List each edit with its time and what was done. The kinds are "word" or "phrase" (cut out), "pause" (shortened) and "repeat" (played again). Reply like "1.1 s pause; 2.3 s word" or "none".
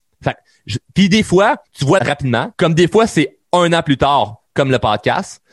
1.7 s pause; 2.0 s word; 2.5 s pause